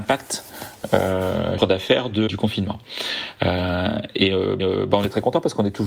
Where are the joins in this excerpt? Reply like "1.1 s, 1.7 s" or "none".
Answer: 1.6 s, 2.3 s, 4.6 s